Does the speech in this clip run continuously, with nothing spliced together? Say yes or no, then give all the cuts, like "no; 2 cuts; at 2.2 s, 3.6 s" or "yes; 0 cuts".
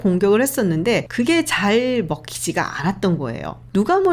yes; 0 cuts